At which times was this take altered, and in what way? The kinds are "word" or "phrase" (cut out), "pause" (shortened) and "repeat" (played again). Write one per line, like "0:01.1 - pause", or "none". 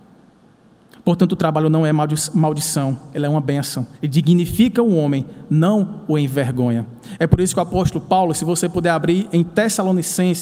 0:03.9 - pause